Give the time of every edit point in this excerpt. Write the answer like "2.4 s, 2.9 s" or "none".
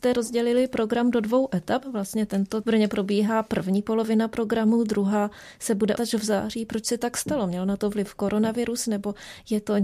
2.6 s, 6.0 s